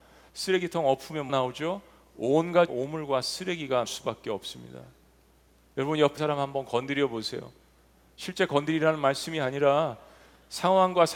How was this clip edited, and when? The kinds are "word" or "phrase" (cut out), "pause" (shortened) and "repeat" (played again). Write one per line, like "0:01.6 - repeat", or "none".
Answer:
0:01.3 - word
0:02.7 - word
0:03.9 - word
0:06.2 - word

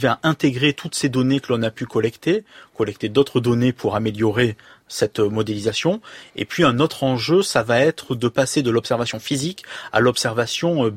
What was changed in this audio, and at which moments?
none

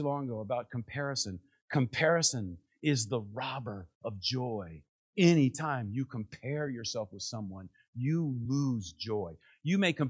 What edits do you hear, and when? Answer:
none

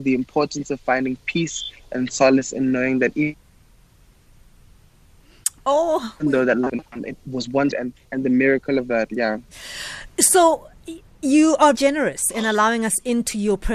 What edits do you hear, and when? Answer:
0:07.7 - word
0:11.7 - word

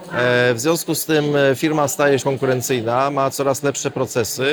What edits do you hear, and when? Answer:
0:02.2 - phrase

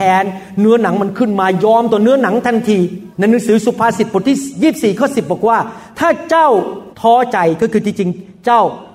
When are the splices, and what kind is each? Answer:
0:03.1 - pause
0:06.9 - pause

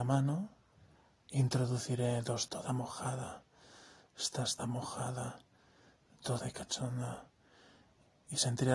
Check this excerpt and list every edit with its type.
0:02.5 - phrase
0:04.6 - word
0:06.4 - word

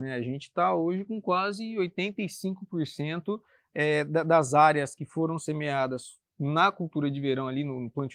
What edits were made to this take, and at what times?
none

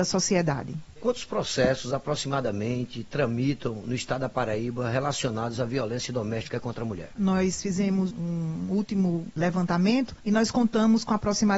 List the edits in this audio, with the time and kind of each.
none

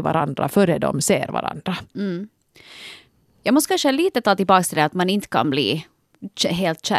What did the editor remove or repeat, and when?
none

